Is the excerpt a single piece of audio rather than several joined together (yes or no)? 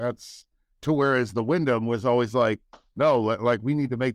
yes